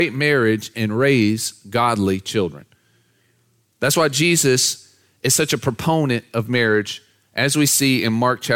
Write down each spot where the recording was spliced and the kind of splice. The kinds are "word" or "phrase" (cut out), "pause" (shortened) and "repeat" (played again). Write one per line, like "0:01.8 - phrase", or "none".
none

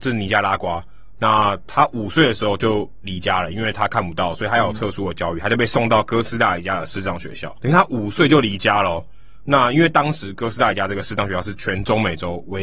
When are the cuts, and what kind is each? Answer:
none

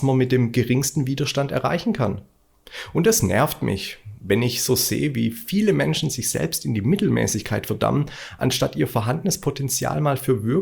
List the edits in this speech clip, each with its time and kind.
none

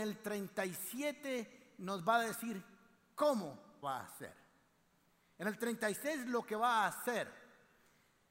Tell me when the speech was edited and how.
0:03.8 - word

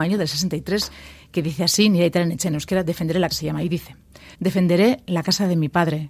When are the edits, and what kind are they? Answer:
0:03.3 - phrase
0:04.3 - pause

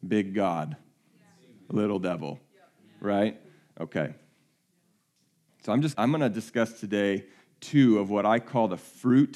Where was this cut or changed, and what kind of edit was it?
0:05.9 - word

